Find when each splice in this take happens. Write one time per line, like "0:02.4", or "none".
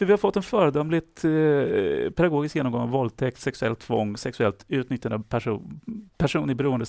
none